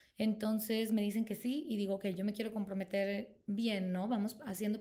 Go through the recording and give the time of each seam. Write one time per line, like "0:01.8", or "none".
none